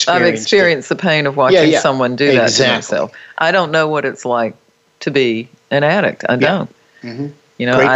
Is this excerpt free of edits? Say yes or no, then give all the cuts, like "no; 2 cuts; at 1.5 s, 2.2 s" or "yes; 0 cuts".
yes; 0 cuts